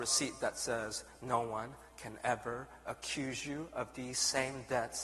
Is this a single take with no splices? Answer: yes; 0 cuts

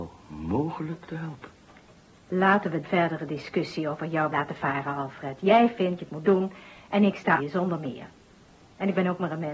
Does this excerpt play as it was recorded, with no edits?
no; 4 cuts; at 2.8 s, 4.3 s, 6.0 s, 7.4 s

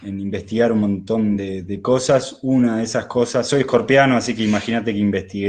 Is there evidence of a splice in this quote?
no; 0 cuts

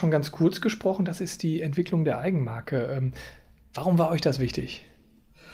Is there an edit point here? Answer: no; 0 cuts

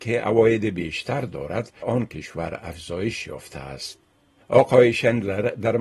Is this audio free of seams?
no; 1 cut; at 1.8 s

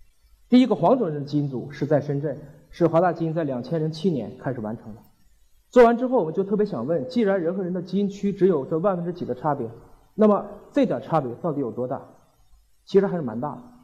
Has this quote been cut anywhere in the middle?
no; 0 cuts

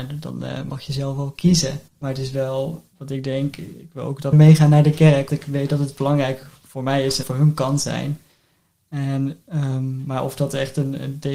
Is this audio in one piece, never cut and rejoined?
no; 5 cuts; at 1.9 s, 2.9 s, 4.3 s, 5.3 s, 7.2 s

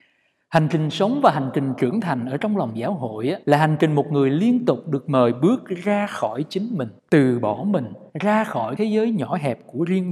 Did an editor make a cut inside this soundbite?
yes; 4 cuts; at 3.4 s, 7.0 s, 8.1 s, 8.8 s

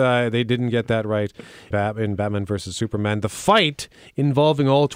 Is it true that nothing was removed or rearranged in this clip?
no; 1 cut; at 1.7 s

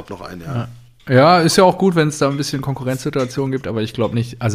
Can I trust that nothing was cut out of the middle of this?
yes; 0 cuts

